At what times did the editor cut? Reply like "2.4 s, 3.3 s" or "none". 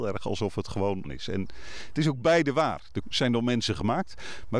1.0 s, 3.0 s